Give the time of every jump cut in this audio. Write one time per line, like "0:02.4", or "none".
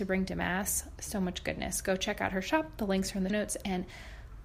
0:03.3